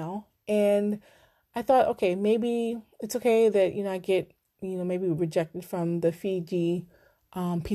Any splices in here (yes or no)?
no